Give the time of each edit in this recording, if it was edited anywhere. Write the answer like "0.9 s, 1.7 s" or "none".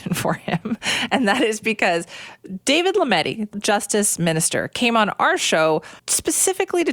3.5 s, 6.0 s